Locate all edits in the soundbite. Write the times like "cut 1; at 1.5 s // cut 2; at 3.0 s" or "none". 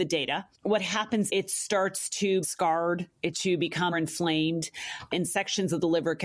cut 1; at 1.3 s // cut 2; at 2.4 s // cut 3; at 3.3 s // cut 4; at 3.9 s